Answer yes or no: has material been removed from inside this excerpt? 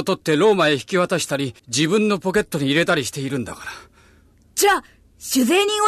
yes